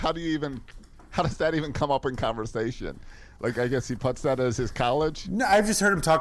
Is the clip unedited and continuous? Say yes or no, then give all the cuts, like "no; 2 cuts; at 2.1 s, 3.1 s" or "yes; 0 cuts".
yes; 0 cuts